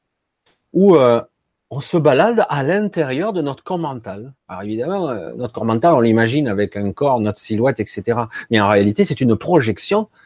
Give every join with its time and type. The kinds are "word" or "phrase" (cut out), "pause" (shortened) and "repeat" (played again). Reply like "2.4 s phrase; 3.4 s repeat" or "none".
4.4 s pause